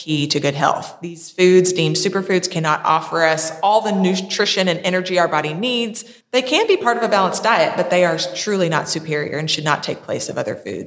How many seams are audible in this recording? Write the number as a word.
one